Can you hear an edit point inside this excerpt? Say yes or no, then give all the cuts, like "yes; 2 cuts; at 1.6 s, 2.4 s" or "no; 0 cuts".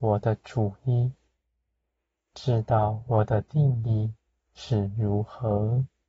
no; 0 cuts